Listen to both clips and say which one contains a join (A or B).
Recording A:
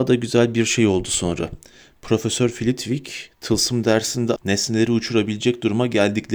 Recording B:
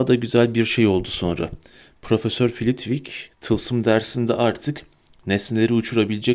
A